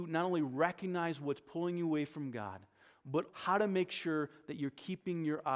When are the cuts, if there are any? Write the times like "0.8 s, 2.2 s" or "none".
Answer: 3.3 s